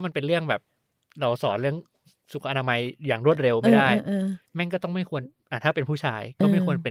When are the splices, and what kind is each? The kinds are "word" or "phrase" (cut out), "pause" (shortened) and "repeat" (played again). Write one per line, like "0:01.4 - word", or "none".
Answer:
0:04.5 - pause